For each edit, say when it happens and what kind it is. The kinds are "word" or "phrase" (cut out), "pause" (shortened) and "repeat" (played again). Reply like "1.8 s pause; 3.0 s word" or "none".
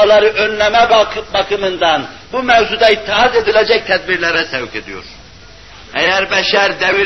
none